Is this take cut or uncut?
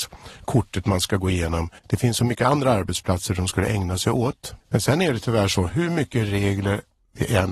cut